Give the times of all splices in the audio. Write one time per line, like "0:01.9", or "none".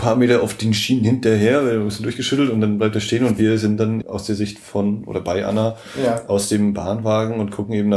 0:04.0